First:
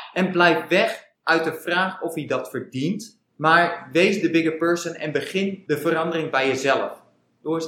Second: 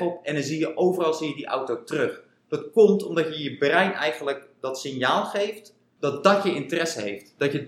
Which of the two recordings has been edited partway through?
first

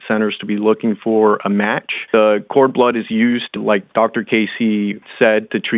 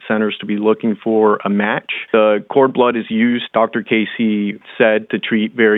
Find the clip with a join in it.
second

